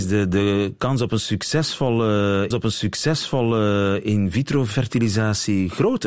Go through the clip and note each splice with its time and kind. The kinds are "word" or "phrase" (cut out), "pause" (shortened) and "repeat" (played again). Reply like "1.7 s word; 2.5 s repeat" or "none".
2.5 s repeat